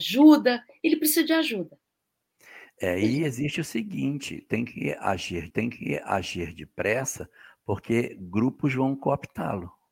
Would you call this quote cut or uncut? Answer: cut